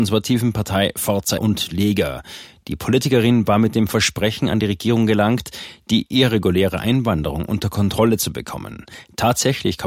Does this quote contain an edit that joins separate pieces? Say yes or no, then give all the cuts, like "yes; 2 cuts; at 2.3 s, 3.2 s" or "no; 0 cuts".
yes; 1 cut; at 1.4 s